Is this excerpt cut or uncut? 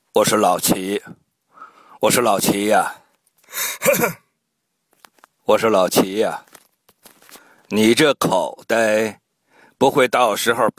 uncut